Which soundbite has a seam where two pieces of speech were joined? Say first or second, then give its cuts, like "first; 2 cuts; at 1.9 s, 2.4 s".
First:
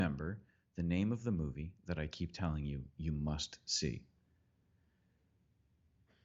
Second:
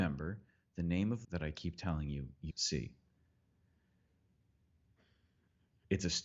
second; 2 cuts; at 1.2 s, 2.5 s